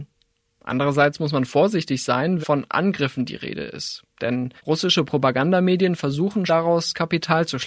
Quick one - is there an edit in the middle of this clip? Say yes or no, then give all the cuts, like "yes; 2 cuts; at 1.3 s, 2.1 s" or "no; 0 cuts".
yes; 3 cuts; at 2.4 s, 4.6 s, 6.5 s